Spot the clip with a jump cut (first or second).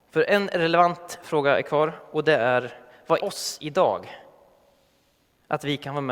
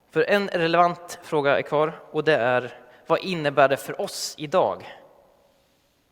first